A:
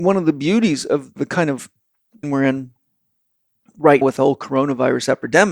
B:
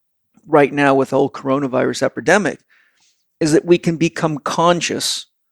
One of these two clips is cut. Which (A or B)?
A